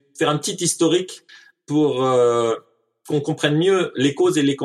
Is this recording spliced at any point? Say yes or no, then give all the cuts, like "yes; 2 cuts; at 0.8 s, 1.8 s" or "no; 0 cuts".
no; 0 cuts